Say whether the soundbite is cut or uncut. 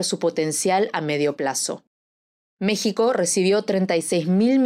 uncut